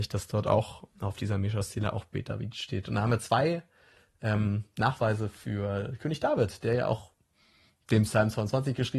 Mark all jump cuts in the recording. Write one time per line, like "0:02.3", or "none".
none